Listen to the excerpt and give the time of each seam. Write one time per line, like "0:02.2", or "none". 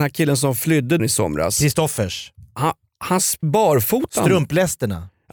0:01.0
0:03.4

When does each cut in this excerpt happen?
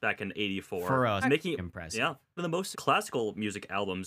0:01.2
0:01.6
0:02.4
0:02.7

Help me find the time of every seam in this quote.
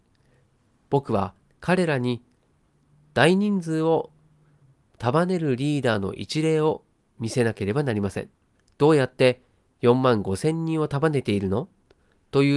0:08.5

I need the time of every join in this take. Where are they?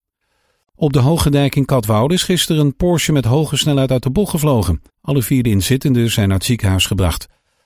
0:04.9

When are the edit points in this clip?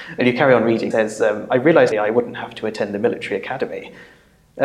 0:00.9
0:01.9

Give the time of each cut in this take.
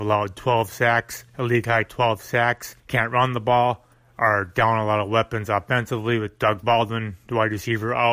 0:02.8
0:03.9

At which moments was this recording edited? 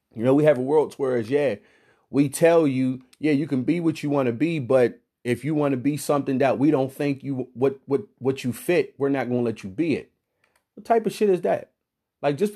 none

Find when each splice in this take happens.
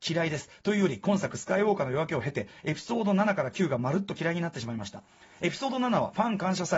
none

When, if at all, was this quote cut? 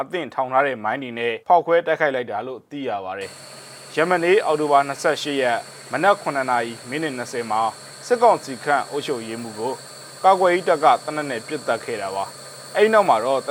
0:01.4

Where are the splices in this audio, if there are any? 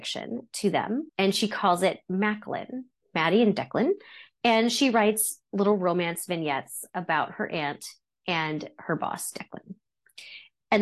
0:01.1

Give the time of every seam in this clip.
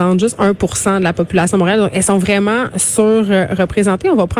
none

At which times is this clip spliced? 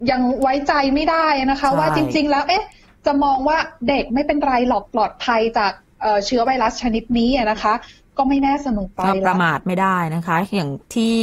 none

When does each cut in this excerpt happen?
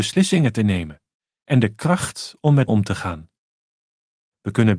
0:02.7

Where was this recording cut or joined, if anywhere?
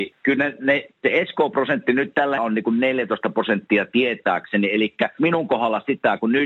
0:00.9
0:02.4
0:05.2

